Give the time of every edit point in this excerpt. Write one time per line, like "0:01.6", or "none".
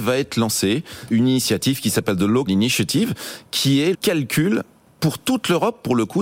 0:01.1
0:02.5
0:03.9